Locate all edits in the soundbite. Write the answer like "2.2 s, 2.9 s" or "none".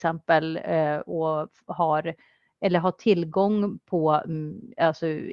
none